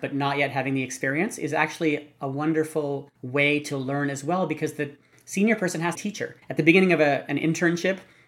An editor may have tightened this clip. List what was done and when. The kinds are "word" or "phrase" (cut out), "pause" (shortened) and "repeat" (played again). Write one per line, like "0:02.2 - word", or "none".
0:03.1 - pause
0:05.9 - phrase
0:06.4 - pause